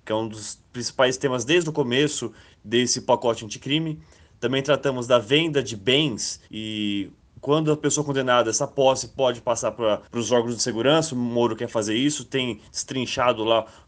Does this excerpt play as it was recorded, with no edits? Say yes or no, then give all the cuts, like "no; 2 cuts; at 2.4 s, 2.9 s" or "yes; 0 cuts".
no; 2 cuts; at 6.5 s, 10.1 s